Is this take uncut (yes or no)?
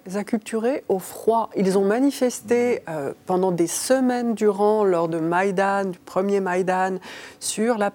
yes